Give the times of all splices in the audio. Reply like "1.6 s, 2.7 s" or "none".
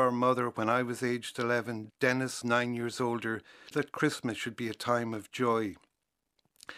2.4 s, 3.7 s